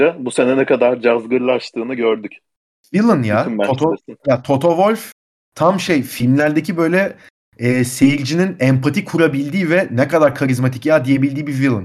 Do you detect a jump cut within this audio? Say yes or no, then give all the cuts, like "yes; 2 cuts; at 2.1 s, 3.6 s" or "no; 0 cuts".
no; 0 cuts